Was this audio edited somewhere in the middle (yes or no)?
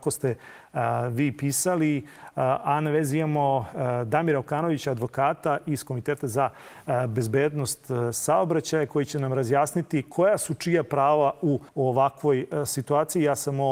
yes